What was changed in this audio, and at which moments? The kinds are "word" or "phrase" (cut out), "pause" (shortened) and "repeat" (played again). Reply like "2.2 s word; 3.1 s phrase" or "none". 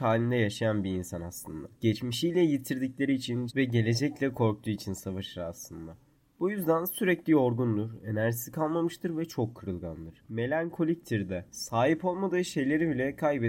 3.5 s word